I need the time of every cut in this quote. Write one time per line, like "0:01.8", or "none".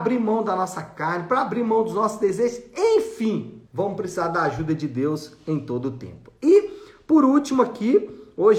0:03.7

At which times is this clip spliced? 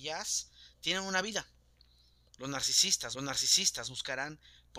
0:03.1

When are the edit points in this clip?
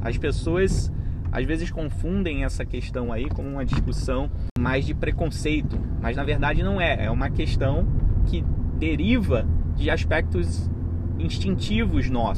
none

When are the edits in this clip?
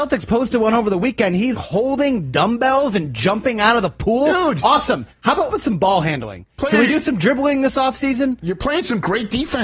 0:01.5
0:05.5

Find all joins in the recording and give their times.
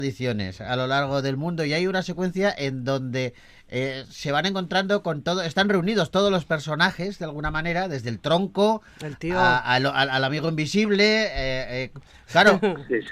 none

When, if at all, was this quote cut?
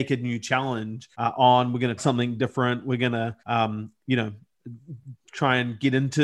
0:01.1
0:02.0
0:03.4

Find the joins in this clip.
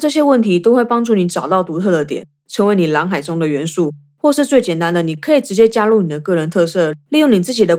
none

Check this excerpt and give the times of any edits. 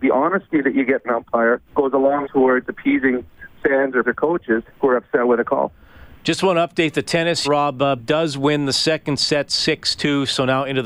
0:01.0
0:01.7
0:02.2
0:04.0
0:04.7
0:06.2
0:07.4
0:08.0

